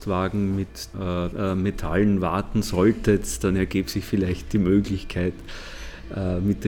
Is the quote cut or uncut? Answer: cut